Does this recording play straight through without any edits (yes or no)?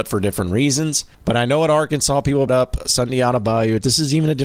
no